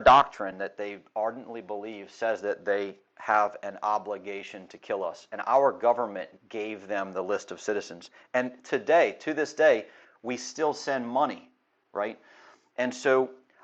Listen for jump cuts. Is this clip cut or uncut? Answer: uncut